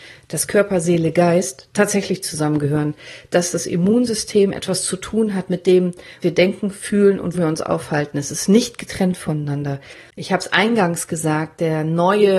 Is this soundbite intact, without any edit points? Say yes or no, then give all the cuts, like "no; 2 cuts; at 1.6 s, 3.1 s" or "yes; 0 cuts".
no; 2 cuts; at 6.2 s, 7.3 s